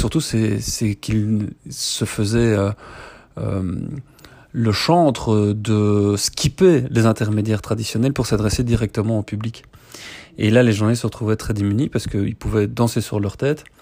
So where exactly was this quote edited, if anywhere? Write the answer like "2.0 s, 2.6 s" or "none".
none

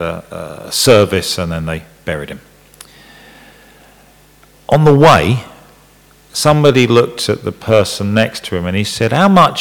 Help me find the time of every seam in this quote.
none

